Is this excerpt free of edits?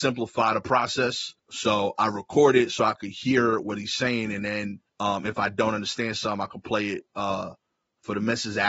no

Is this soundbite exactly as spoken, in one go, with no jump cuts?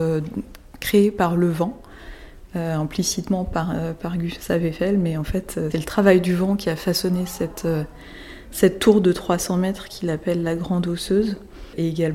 no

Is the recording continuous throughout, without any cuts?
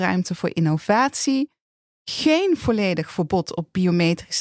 yes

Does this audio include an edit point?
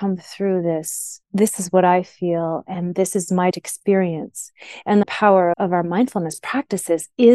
yes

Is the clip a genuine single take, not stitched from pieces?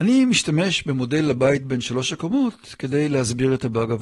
yes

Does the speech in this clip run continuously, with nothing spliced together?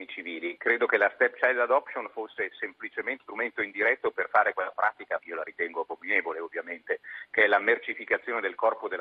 no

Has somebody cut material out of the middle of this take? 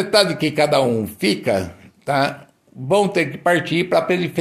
no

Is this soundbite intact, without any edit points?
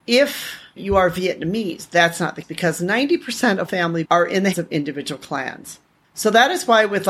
no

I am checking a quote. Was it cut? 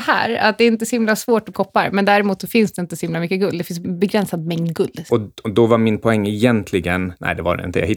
yes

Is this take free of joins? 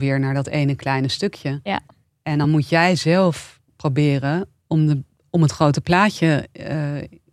yes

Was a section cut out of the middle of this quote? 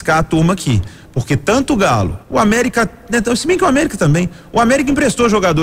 yes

